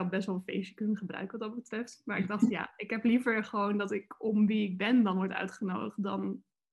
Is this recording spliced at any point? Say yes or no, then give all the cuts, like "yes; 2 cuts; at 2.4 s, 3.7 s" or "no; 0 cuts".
no; 0 cuts